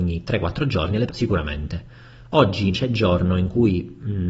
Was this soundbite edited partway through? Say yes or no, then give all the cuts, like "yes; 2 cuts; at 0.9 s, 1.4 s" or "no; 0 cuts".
yes; 2 cuts; at 1.1 s, 2.7 s